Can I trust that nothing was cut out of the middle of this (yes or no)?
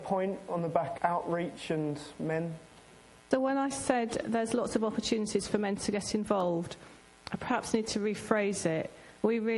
no